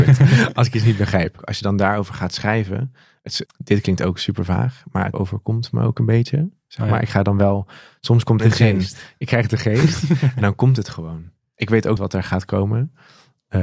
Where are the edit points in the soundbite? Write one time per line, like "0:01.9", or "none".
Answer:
0:03.5
0:05.1
0:08.4
0:12.0